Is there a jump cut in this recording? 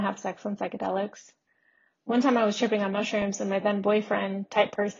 no; 0 cuts

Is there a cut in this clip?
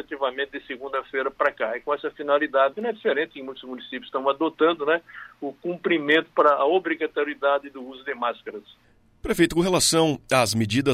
yes; 1 cut; at 2.7 s

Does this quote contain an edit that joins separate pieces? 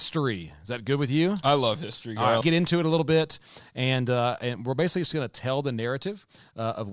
yes; 1 cut; at 2.4 s

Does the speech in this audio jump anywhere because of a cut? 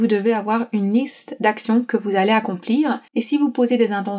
yes; 1 cut; at 3.1 s

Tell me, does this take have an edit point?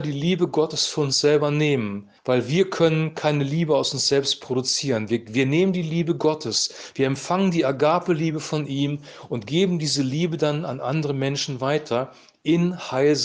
yes; 1 cut; at 2.2 s

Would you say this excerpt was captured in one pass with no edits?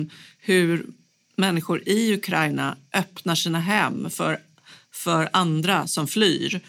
yes; 0 cuts

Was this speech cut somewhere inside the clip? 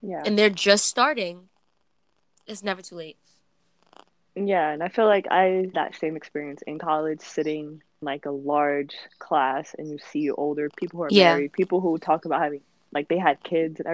yes; 3 cuts; at 5.7 s, 8.0 s, 10.7 s

